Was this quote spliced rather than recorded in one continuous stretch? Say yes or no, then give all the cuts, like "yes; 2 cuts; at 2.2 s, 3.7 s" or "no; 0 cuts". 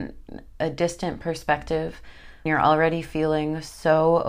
yes; 1 cut; at 2.5 s